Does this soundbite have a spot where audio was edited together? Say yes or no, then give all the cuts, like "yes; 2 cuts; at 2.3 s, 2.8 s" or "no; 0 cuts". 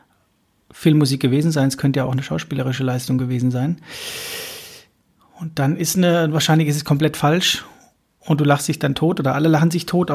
no; 0 cuts